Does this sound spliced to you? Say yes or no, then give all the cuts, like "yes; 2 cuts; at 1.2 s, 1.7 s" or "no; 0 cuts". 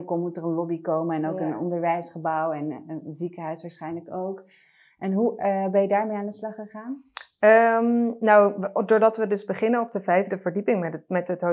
no; 0 cuts